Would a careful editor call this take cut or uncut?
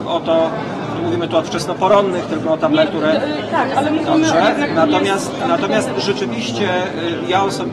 cut